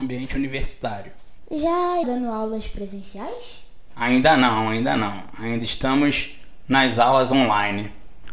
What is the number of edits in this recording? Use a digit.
1